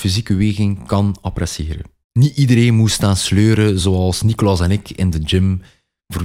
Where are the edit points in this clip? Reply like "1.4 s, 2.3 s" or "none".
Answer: none